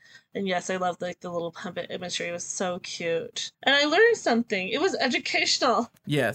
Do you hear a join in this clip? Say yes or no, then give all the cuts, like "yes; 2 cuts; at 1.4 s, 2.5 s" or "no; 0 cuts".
yes; 1 cut; at 3.5 s